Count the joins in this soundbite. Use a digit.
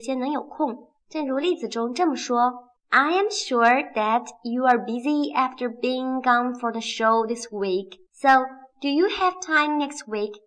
3